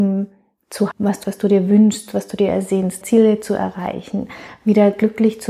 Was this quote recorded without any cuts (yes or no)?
no